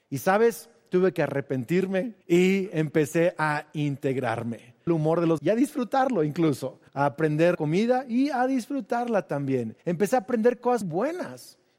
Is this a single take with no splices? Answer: no; 7 cuts; at 2.2 s, 4.9 s, 5.4 s, 6.9 s, 7.5 s, 9.8 s, 10.8 s

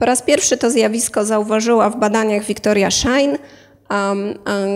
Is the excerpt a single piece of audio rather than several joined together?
yes; 0 cuts

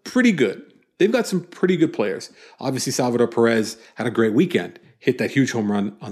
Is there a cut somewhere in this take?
no; 0 cuts

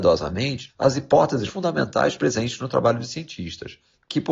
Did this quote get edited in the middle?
yes; 1 cut; at 1.5 s

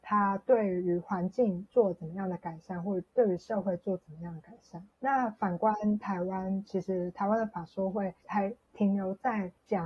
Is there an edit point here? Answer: yes; 1 cut; at 4.9 s

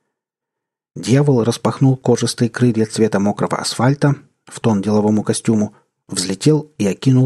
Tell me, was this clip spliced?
no; 0 cuts

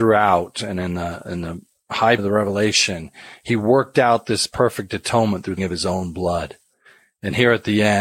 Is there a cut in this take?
yes; 2 cuts; at 2.2 s, 5.6 s

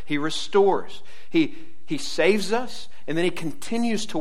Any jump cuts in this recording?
no; 0 cuts

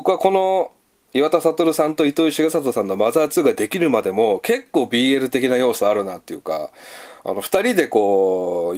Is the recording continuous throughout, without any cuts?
yes; 0 cuts

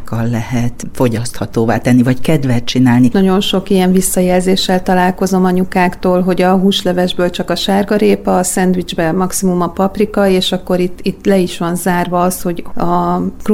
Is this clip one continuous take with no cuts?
yes; 0 cuts

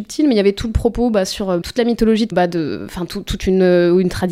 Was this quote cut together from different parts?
yes; 2 cuts; at 1.6 s, 2.3 s

